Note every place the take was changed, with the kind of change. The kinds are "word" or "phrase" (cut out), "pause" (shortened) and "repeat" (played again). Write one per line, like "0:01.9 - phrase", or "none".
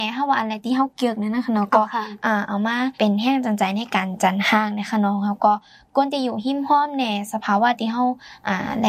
0:02.9 - pause